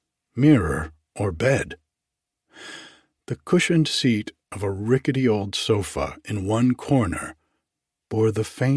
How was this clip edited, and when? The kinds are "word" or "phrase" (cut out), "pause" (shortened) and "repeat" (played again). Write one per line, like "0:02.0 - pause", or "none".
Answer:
none